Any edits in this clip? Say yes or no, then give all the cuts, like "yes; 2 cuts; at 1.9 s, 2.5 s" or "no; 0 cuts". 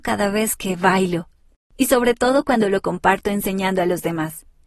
no; 0 cuts